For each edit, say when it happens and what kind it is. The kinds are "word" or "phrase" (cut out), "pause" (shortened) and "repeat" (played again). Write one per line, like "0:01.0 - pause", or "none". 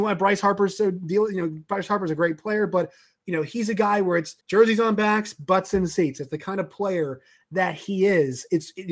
0:04.4 - pause